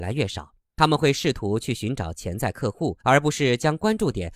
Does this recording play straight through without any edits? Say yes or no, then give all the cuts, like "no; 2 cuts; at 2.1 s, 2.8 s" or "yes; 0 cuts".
no; 1 cut; at 3.0 s